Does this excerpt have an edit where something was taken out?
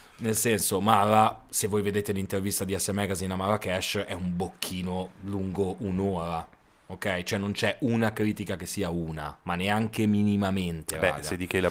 no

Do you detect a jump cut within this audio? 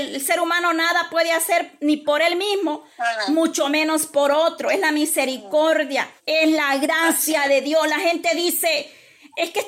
yes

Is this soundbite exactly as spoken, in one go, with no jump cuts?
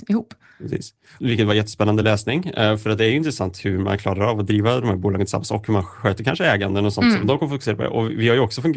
yes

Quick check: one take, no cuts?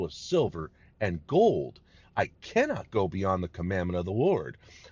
yes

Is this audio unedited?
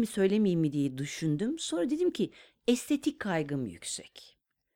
yes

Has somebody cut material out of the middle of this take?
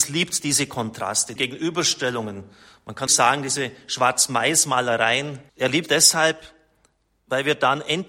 yes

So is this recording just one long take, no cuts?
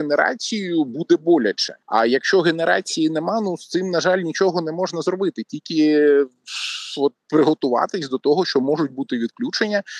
no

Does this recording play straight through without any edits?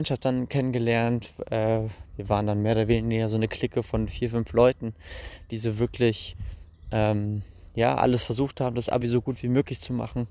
yes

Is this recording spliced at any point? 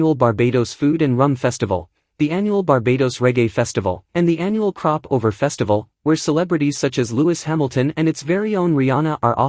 yes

